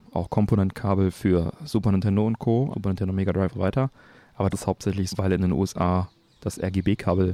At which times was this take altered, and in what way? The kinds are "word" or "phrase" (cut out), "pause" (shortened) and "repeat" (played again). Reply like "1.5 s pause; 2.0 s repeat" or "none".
2.7 s word; 3.5 s word; 4.5 s word; 5.1 s word